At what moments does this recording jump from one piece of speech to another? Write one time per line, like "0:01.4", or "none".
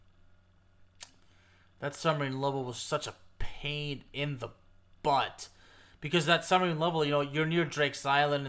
none